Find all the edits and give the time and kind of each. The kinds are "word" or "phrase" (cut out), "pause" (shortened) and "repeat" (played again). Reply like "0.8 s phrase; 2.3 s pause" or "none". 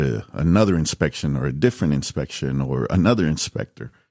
none